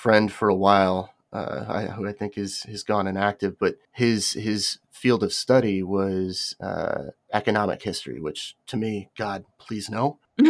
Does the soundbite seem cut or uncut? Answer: cut